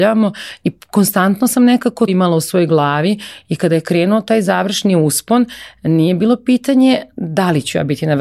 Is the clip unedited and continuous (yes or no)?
no